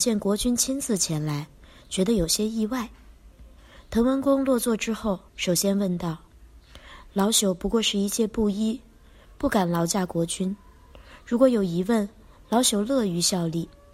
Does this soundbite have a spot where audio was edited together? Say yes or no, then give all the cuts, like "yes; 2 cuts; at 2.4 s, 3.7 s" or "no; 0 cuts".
yes; 1 cut; at 5.3 s